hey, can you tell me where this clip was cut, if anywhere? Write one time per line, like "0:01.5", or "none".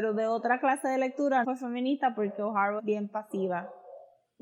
0:01.4
0:02.8

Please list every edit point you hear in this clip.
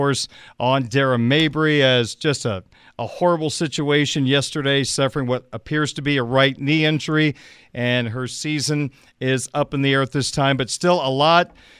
none

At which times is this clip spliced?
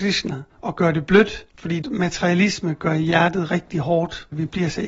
0:01.5

